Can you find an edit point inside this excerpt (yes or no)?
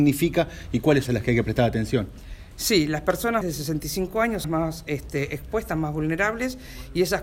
yes